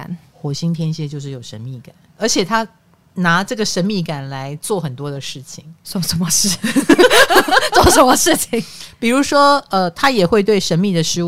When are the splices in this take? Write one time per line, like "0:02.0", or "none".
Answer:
none

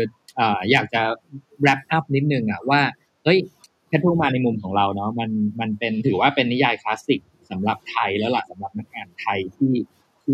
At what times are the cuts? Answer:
none

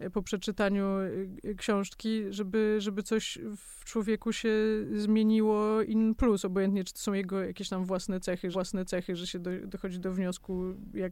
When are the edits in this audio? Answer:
0:08.5

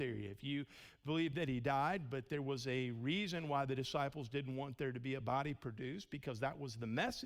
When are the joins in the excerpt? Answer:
none

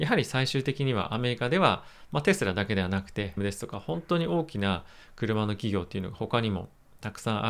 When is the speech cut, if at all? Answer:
0:03.4

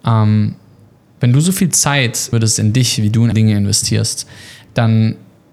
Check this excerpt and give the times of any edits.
0:02.3
0:03.3

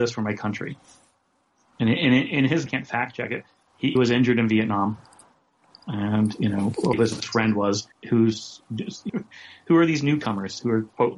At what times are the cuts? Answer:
0:02.7
0:04.0
0:06.9
0:07.9
0:09.1

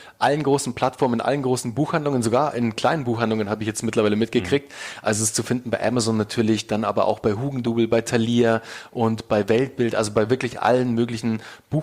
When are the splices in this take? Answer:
none

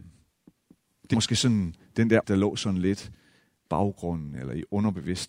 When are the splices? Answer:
0:01.1
0:02.2
0:03.6

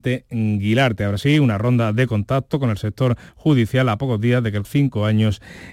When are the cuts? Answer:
0:04.6

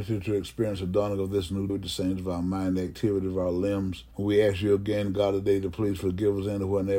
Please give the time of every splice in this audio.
0:01.7
0:04.1

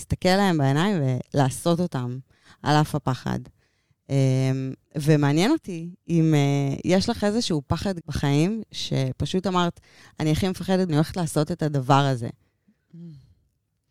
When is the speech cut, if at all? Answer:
0:04.8
0:08.0
0:10.9

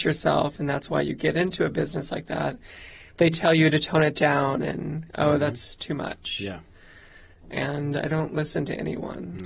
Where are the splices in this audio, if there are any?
none

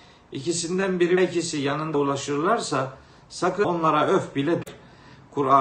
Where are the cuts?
0:01.2
0:01.9
0:03.6

